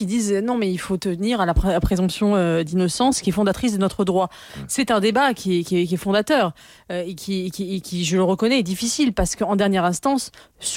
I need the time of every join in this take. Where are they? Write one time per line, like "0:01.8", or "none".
none